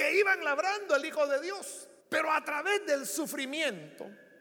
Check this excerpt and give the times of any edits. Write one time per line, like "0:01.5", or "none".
0:02.0